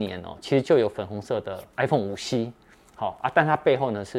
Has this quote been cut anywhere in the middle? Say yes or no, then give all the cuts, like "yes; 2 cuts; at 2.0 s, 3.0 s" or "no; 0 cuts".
no; 0 cuts